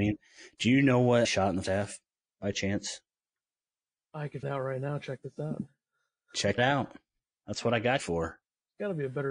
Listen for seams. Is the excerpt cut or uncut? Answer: cut